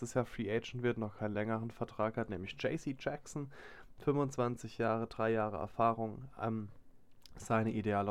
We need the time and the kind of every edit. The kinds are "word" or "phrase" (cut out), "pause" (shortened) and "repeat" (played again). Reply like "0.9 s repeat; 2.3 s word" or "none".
none

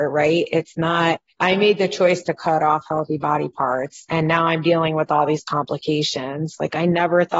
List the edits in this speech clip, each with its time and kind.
1.3 s pause

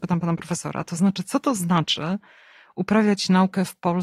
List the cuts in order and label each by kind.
none

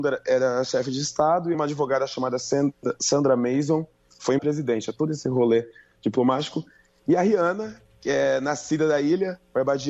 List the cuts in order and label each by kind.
1.5 s word; 4.4 s word

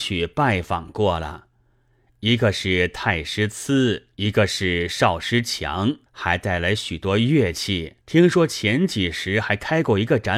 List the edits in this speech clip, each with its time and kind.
4.1 s pause; 6.1 s pause; 8.0 s pause

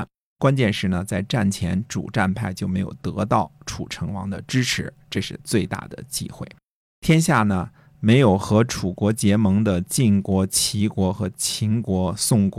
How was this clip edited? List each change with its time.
none

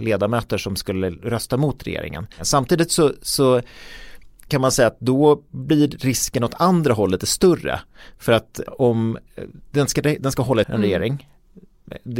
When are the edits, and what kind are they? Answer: 2.3 s pause; 7.2 s word; 8.7 s word; 10.6 s phrase

